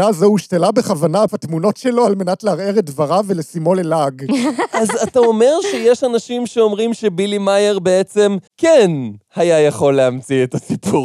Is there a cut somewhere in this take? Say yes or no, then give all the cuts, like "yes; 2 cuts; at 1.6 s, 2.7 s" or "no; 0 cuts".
yes; 2 cuts; at 1.3 s, 8.5 s